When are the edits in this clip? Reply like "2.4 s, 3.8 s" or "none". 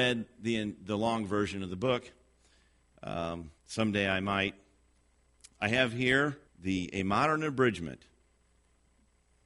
3.6 s, 6.5 s